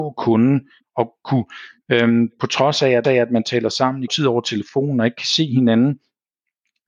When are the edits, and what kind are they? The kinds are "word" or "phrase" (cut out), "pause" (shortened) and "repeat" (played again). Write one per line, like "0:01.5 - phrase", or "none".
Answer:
0:03.0 - repeat
0:04.1 - word